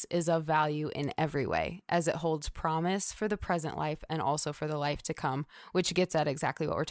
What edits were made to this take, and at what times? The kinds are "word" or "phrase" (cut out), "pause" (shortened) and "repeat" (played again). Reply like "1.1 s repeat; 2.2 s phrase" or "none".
none